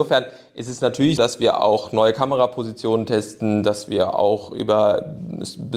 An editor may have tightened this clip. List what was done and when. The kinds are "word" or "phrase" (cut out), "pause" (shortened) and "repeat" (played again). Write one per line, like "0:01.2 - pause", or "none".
0:01.2 - word